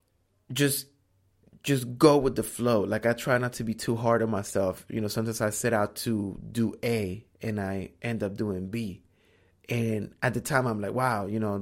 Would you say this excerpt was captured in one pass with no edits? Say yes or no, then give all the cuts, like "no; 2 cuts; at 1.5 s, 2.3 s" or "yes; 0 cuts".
yes; 0 cuts